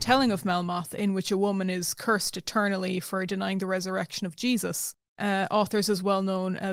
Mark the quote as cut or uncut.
uncut